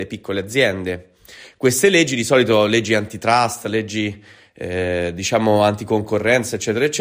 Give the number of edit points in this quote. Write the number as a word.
zero